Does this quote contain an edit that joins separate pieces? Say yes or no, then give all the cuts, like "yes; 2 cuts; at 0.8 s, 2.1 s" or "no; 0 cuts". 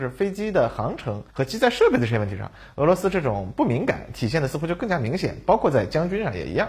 yes; 1 cut; at 1.3 s